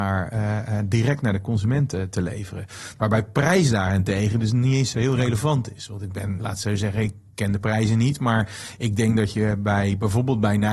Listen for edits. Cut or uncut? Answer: cut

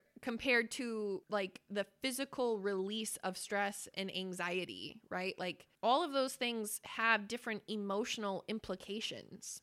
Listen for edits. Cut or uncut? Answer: uncut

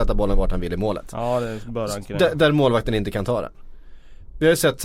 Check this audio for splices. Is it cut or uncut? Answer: uncut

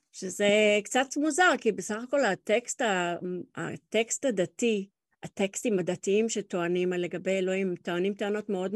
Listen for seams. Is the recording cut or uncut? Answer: uncut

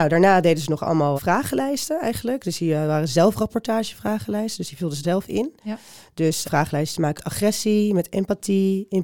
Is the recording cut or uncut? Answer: cut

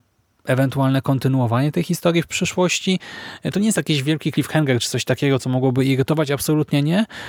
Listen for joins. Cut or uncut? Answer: uncut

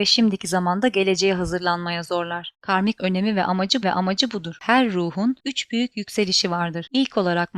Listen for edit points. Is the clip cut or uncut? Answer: cut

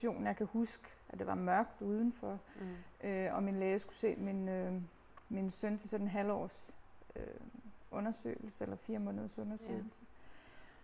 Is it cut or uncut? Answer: uncut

